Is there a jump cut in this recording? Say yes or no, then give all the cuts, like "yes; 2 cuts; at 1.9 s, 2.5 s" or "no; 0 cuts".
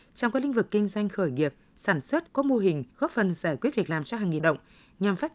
yes; 3 cuts; at 2.3 s, 2.9 s, 4.4 s